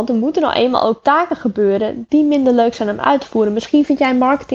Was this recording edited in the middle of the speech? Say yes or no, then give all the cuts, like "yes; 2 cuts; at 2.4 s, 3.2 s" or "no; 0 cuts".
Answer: no; 0 cuts